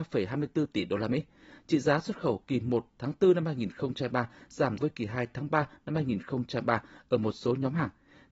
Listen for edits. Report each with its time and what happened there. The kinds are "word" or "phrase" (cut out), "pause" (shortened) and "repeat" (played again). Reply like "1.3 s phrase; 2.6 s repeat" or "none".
4.8 s word